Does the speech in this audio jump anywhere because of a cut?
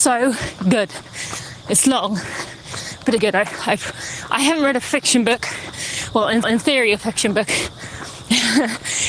yes; 2 cuts; at 3.2 s, 6.4 s

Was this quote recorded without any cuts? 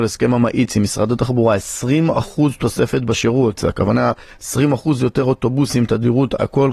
yes; 0 cuts

